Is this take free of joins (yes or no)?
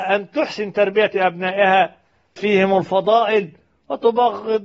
no